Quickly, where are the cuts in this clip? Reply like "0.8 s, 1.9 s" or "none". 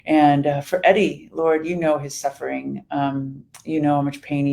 none